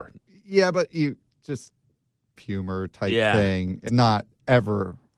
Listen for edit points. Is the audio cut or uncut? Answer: cut